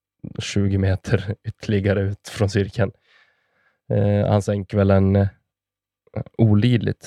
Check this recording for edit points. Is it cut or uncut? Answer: uncut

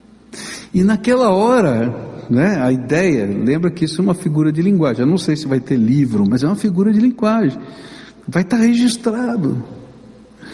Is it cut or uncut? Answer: cut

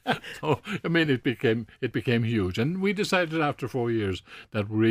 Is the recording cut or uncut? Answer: uncut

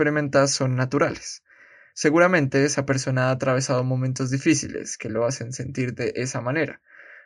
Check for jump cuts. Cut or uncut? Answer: uncut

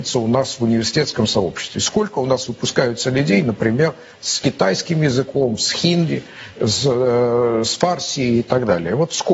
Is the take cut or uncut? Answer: uncut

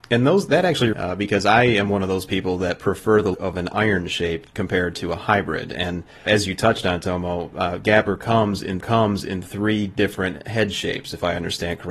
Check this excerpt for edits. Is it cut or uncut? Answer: cut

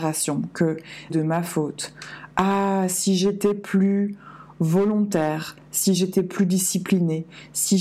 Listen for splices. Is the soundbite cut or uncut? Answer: cut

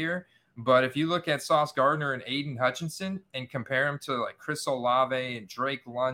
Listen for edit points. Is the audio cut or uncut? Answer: uncut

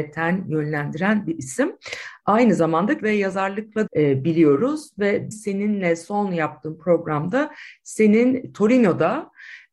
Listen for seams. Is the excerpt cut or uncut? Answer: cut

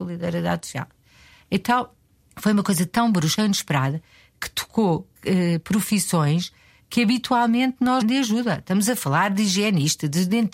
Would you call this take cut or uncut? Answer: cut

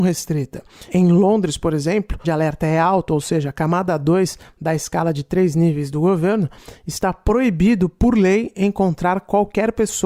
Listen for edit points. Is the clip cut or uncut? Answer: cut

